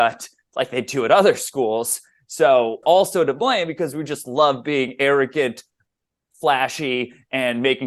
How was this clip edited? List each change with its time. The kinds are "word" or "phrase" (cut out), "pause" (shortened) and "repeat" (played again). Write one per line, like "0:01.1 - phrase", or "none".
0:02.8 - word